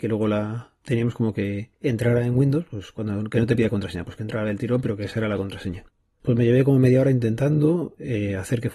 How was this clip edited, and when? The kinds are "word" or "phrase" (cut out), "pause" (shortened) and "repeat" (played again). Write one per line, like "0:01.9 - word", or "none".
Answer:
none